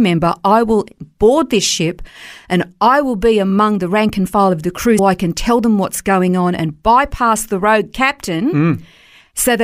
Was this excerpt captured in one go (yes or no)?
no